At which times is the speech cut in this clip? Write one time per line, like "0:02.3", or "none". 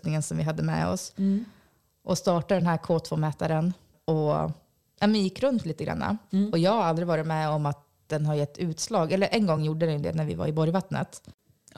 none